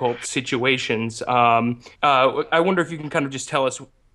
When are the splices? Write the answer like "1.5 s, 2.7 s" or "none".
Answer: 1.9 s